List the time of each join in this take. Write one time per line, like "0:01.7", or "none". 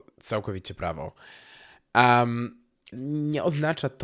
0:02.9